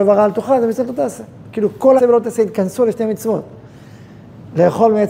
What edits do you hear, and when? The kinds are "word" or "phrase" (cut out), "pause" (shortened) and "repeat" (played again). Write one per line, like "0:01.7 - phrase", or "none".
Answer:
0:02.0 - word